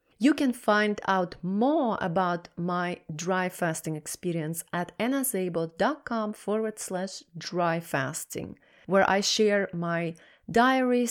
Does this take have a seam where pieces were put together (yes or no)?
no